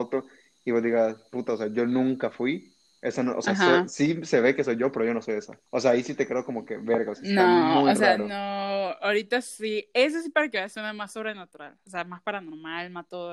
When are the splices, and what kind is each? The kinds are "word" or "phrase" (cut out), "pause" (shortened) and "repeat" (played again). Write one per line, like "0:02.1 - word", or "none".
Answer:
0:05.7 - pause